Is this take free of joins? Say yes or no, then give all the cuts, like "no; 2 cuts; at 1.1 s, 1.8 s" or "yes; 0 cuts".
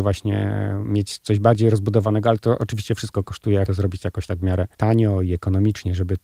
no; 2 cuts; at 3.7 s, 4.7 s